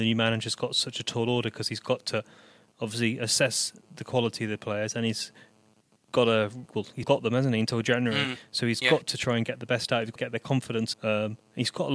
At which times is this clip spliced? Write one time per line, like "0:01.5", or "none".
0:06.7
0:07.0
0:10.2
0:10.9